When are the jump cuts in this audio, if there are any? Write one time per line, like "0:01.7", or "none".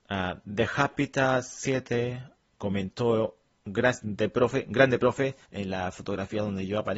0:05.4